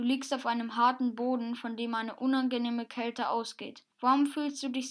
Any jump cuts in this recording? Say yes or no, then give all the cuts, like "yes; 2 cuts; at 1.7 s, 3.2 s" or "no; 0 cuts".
yes; 1 cut; at 3.9 s